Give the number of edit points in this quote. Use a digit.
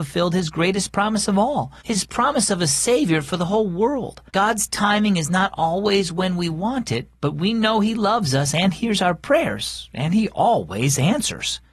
2